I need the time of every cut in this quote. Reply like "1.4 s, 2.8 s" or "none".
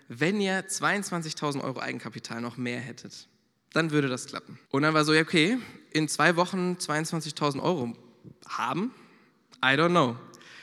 4.7 s